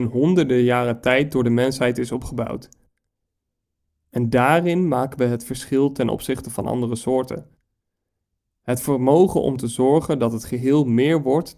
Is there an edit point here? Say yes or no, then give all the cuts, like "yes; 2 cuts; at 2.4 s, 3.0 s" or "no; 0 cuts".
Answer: no; 0 cuts